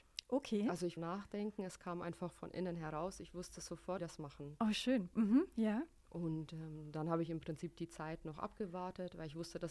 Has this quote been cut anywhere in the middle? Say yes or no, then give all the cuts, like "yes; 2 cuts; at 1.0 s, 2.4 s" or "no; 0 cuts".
yes; 2 cuts; at 1.0 s, 4.0 s